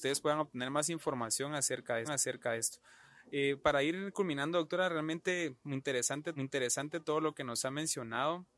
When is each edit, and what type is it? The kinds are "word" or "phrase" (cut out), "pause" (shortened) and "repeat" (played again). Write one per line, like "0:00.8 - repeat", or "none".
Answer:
0:02.0 - repeat
0:06.4 - repeat

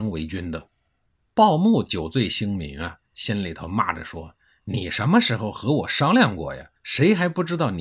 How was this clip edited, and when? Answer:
0:06.8 - pause

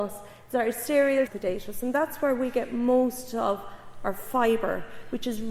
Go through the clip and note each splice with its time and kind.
0:01.3 - phrase

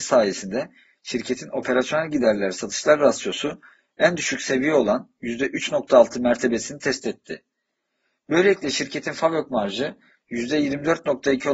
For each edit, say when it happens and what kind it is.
none

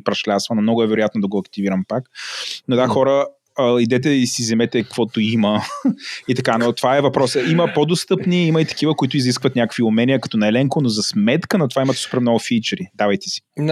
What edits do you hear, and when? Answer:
none

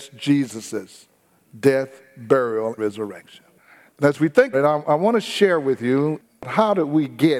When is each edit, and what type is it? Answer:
0:02.8 - word
0:04.5 - word

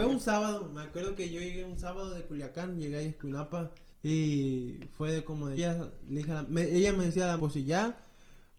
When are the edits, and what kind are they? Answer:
0:03.9 - pause
0:05.6 - word
0:07.4 - word

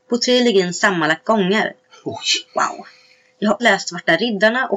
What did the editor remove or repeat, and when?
0:01.2 - word
0:02.5 - pause
0:03.6 - word

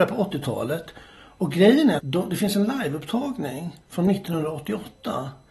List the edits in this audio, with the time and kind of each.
0:02.0 - word
0:03.8 - pause

